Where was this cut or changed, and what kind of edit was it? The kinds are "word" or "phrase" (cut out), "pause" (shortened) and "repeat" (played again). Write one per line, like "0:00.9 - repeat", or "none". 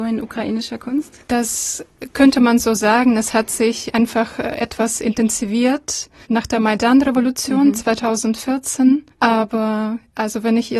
0:01.2 - pause
0:06.2 - pause
0:09.1 - pause